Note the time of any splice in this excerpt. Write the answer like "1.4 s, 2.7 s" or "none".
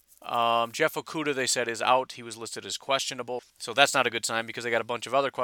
3.5 s